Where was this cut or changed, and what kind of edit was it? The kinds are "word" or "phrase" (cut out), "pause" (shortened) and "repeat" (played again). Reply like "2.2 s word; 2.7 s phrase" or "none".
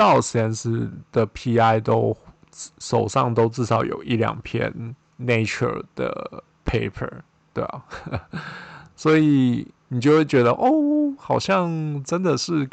none